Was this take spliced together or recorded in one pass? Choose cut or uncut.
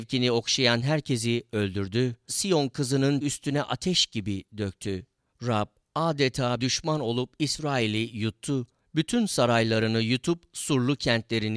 cut